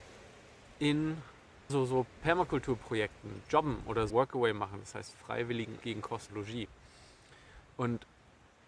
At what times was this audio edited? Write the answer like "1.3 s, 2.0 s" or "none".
1.7 s, 4.1 s, 5.1 s, 5.8 s, 6.3 s